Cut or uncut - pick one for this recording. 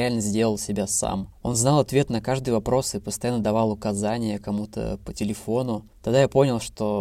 uncut